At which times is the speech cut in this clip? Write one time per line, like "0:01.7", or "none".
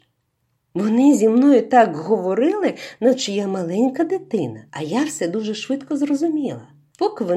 0:04.7